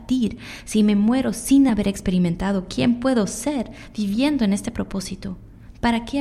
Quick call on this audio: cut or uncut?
uncut